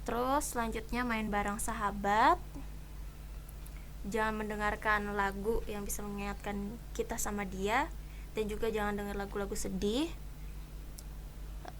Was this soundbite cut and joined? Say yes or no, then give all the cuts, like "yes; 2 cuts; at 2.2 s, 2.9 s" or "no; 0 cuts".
no; 0 cuts